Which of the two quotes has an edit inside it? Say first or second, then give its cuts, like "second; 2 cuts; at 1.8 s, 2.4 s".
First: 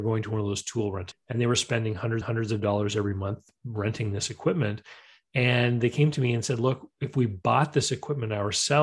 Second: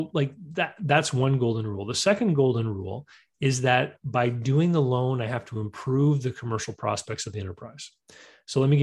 first; 2 cuts; at 1.1 s, 2.2 s